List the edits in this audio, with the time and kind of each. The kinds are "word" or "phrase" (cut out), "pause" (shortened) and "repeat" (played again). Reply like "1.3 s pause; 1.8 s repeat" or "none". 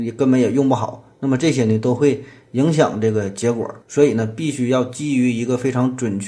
3.8 s pause